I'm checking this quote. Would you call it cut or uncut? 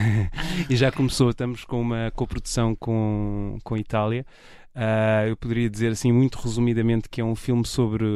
uncut